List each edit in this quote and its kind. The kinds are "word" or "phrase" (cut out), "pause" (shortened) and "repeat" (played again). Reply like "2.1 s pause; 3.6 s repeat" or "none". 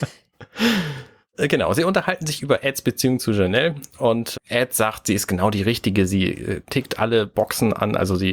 4.3 s word